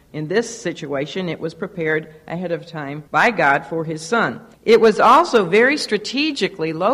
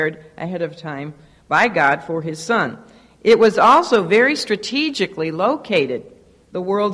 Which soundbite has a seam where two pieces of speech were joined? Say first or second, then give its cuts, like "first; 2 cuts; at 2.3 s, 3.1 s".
first; 2 cuts; at 3.1 s, 4.5 s